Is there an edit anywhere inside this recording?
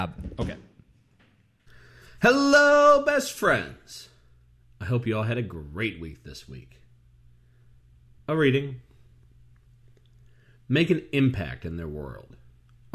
no; 0 cuts

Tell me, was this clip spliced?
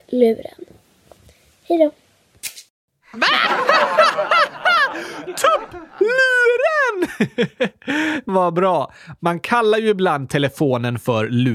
yes; 1 cut; at 8.3 s

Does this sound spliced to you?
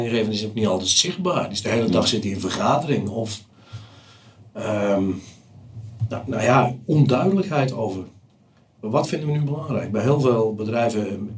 no; 0 cuts

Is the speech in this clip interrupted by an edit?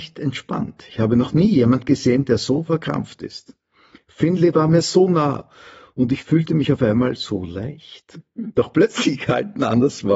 no; 0 cuts

